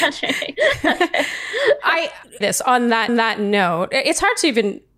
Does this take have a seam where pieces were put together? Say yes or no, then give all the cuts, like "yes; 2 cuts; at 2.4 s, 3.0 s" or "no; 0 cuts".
yes; 2 cuts; at 2.4 s, 3.1 s